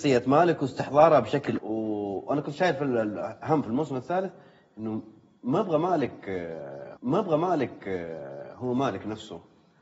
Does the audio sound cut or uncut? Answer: cut